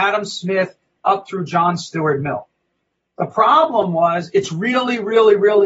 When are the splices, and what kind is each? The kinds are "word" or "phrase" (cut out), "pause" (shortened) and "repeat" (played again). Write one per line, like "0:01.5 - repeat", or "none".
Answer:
none